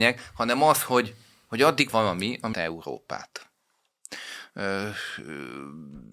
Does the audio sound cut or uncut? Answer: cut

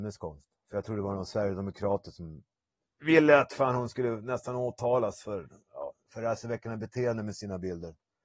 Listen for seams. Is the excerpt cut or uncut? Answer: uncut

